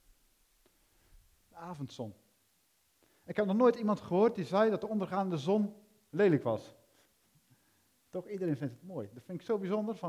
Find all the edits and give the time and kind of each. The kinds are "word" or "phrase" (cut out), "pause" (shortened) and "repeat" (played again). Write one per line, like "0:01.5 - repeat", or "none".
none